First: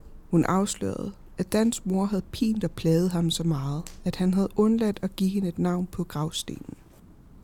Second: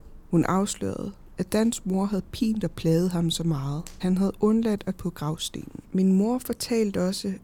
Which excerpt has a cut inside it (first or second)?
second